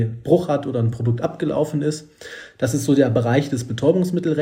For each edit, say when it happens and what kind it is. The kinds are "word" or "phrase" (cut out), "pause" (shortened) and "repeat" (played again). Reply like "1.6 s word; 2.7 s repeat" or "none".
none